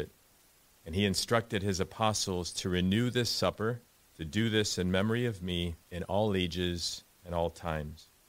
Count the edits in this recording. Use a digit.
3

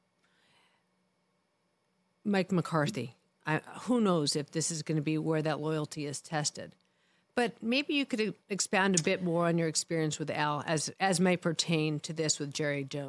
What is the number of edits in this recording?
0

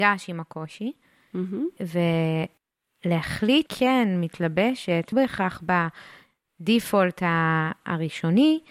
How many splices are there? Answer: 2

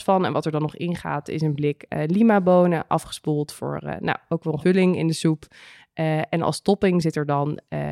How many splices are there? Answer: 1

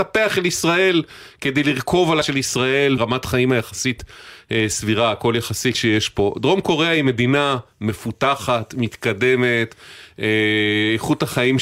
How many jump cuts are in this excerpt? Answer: 3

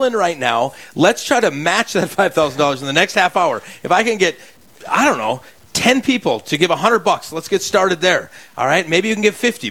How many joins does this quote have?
0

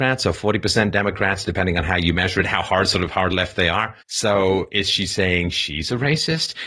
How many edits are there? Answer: 1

